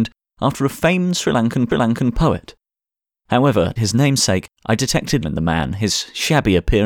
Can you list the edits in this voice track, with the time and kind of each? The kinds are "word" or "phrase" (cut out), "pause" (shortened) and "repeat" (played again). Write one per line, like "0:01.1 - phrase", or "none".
0:01.7 - repeat
0:03.8 - word
0:04.6 - pause
0:05.2 - phrase